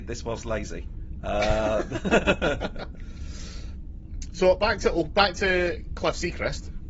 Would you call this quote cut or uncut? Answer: uncut